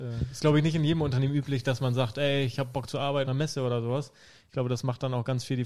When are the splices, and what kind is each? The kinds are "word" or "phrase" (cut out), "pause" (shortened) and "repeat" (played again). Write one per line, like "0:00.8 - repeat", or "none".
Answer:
0:03.2 - word